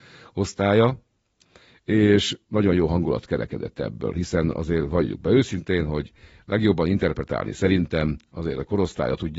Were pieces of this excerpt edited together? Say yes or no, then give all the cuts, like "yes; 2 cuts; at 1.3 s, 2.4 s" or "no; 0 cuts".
no; 0 cuts